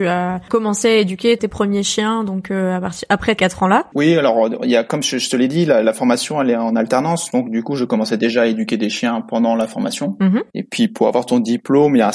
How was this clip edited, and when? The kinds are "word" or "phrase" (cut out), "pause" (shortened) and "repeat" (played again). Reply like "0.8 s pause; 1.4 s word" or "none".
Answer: 1.4 s phrase; 3.4 s word